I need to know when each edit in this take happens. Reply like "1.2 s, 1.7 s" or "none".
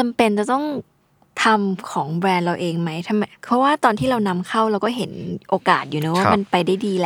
none